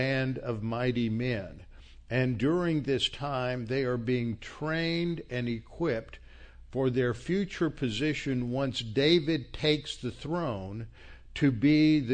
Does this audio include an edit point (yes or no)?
no